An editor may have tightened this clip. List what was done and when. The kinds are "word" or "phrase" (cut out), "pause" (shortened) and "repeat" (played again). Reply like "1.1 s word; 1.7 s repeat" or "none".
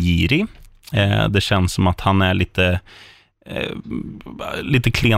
none